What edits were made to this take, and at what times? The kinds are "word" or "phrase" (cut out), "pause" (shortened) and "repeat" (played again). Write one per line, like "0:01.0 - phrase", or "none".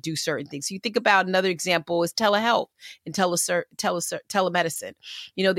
none